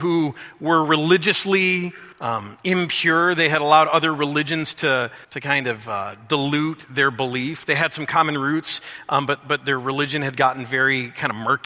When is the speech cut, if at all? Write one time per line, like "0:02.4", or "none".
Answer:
0:02.1
0:05.2